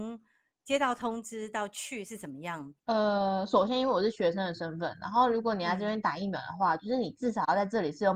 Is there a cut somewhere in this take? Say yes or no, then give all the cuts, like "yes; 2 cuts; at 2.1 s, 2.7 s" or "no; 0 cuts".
yes; 1 cut; at 2.8 s